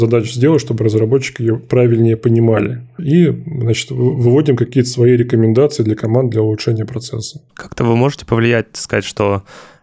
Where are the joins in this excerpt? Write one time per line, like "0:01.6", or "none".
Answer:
0:07.5